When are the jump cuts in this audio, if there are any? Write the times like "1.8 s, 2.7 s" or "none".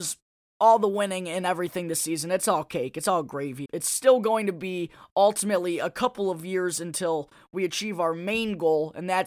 3.7 s